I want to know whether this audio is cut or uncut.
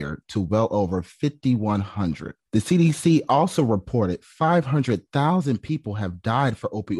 cut